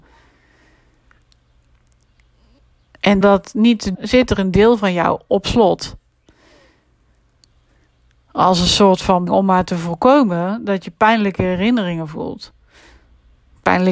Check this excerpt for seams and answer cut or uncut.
cut